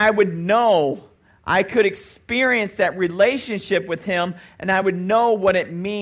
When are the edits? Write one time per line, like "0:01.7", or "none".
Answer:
none